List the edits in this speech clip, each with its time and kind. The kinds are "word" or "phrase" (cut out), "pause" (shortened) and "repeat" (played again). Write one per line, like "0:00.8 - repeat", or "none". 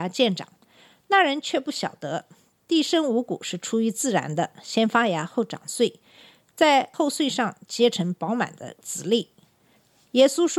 none